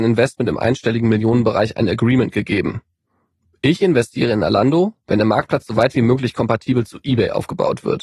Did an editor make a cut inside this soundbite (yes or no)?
no